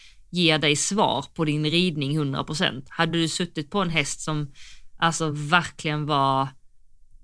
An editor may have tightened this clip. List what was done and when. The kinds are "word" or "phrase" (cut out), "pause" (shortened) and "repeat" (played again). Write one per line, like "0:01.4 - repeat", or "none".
none